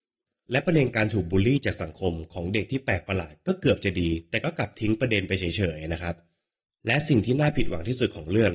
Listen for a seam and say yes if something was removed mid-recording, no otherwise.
no